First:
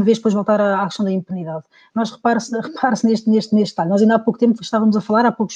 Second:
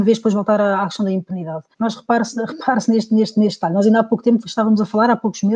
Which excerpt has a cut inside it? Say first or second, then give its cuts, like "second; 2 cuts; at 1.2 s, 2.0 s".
second; 1 cut; at 1.7 s